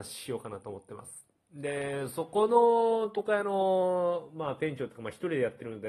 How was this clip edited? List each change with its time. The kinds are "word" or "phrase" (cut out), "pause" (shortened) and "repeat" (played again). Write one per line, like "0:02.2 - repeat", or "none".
none